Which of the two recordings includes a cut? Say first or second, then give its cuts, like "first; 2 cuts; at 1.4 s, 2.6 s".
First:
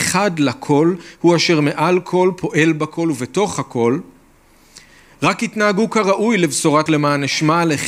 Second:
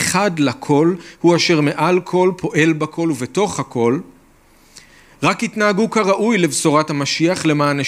first; 1 cut; at 6.9 s